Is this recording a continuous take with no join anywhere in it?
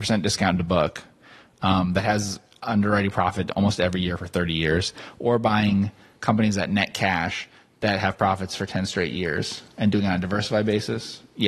yes; 0 cuts

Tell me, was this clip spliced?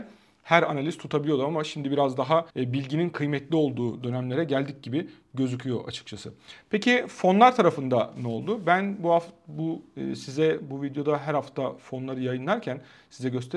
yes; 1 cut; at 2.5 s

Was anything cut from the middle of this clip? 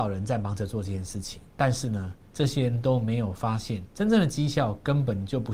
yes; 2 cuts; at 1.5 s, 3.9 s

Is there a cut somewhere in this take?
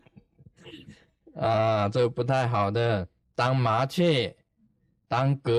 no; 0 cuts

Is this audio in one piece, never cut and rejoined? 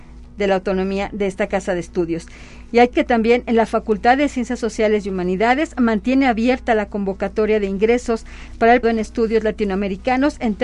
no; 2 cuts; at 2.9 s, 8.8 s

